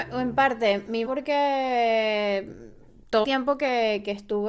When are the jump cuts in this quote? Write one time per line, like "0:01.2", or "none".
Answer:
0:01.0
0:03.2